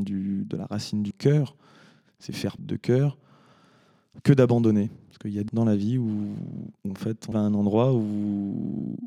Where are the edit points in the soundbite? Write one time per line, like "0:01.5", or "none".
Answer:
0:01.1
0:02.6
0:05.5
0:06.8
0:07.3